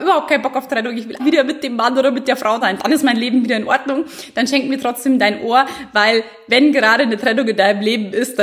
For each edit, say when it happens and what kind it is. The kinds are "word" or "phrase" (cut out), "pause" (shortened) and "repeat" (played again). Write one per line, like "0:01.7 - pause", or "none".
0:01.2 - word
0:02.6 - word